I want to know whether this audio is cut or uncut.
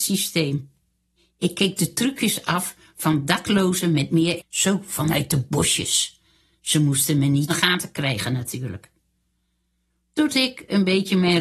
cut